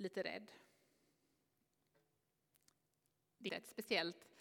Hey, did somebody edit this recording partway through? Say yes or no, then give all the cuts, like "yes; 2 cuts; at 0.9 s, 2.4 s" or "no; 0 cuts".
yes; 1 cut; at 3.5 s